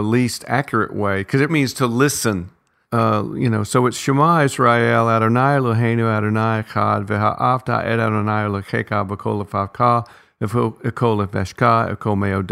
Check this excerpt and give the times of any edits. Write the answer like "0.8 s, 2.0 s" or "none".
1.5 s